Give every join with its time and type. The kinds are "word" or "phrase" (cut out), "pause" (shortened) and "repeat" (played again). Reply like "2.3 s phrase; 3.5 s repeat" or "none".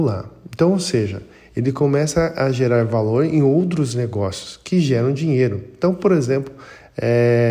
none